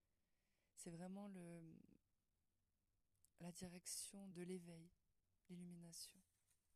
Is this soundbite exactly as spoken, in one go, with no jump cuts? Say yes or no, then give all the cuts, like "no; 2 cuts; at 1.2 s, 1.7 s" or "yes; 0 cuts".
no; 2 cuts; at 3.3 s, 4.3 s